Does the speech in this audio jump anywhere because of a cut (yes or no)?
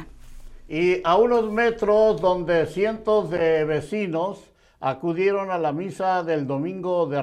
no